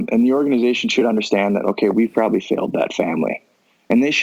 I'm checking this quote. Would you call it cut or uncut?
uncut